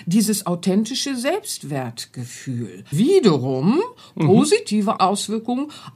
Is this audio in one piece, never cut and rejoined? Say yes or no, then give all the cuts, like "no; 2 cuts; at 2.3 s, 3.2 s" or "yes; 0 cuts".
no; 2 cuts; at 2.9 s, 5.0 s